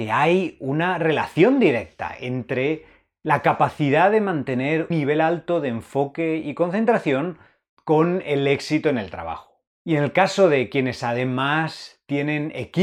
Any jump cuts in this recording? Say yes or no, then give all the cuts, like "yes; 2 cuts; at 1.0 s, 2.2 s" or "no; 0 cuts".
yes; 2 cuts; at 4.9 s, 9.7 s